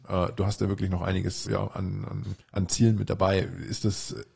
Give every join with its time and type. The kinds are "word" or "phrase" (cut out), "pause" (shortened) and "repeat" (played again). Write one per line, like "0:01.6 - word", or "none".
0:01.5 - word
0:02.4 - pause

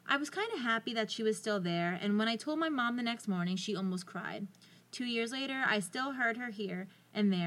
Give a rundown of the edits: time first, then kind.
none

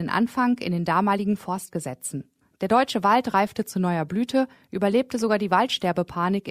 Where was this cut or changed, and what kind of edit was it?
none

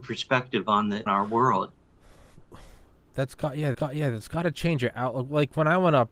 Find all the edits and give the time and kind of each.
0:01.1 - word
0:03.7 - repeat

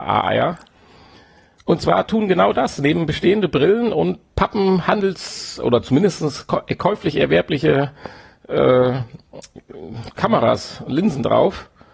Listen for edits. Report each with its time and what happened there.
none

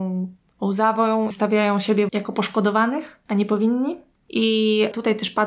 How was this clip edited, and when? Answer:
0:01.3 - word
0:02.1 - word

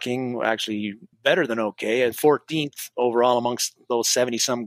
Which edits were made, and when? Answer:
0:01.1 - word
0:02.1 - word

